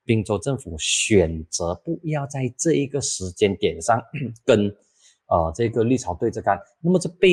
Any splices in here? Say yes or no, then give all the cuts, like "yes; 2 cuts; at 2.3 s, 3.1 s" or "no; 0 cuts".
no; 0 cuts